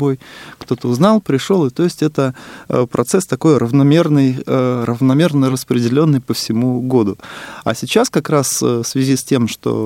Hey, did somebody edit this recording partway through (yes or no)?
no